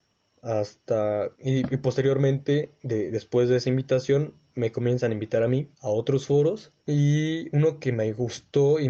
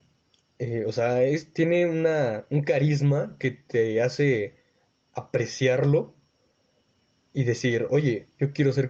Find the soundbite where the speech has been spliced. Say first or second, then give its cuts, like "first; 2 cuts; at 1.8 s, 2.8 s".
first; 3 cuts; at 1.3 s, 5.7 s, 6.8 s